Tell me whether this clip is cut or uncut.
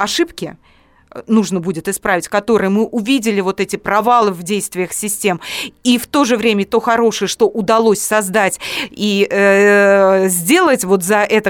uncut